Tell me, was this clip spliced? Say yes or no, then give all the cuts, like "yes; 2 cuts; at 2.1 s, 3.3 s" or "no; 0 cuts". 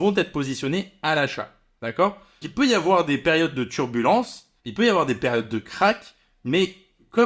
yes; 2 cuts; at 2.4 s, 4.6 s